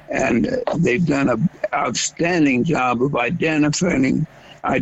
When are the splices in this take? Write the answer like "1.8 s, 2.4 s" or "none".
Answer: none